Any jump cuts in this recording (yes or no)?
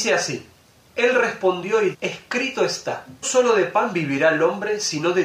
yes